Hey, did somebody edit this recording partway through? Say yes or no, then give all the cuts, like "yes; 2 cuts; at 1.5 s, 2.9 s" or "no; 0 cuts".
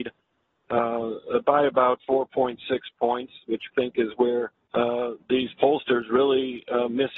yes; 3 cuts; at 2.0 s, 3.7 s, 4.6 s